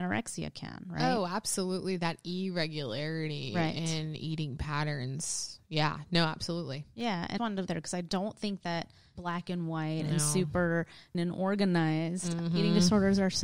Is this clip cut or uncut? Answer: cut